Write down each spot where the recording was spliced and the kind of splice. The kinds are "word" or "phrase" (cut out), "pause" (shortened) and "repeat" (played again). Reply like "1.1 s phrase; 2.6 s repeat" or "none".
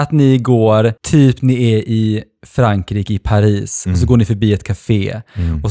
1.0 s pause